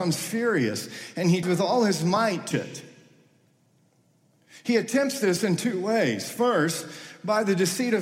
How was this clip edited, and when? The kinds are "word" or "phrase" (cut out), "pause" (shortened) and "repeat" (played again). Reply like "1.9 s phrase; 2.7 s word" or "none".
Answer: 1.4 s word; 2.5 s word